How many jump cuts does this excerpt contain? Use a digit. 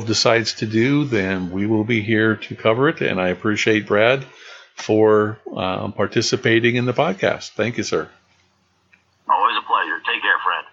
0